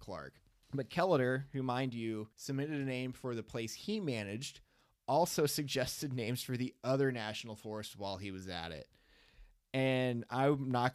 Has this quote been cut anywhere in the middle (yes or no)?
yes